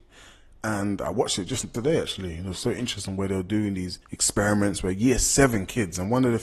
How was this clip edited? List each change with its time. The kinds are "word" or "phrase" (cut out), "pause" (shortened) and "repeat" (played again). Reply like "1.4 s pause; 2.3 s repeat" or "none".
1.7 s word; 4.0 s pause